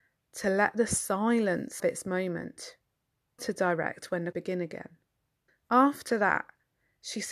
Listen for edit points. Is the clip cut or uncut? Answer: cut